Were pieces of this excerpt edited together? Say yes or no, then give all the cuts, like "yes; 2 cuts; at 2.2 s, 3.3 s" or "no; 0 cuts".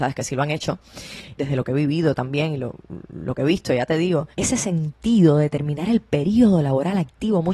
yes; 2 cuts; at 1.4 s, 4.3 s